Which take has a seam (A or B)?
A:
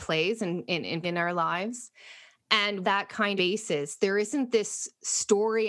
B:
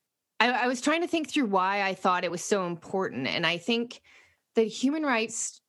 A